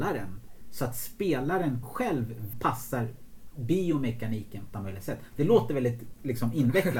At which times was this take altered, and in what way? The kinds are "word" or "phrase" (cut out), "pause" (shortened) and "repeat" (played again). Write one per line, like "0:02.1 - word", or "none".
0:01.8 - word
0:02.5 - phrase
0:04.7 - word